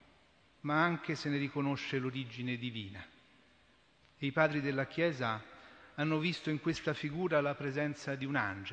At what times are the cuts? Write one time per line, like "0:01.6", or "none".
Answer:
none